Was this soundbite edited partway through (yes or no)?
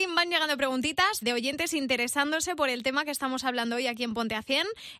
yes